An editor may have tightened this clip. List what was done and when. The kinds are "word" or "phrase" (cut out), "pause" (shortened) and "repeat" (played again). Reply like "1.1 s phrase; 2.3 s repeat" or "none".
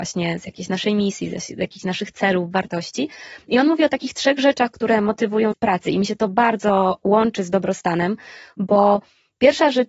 5.5 s word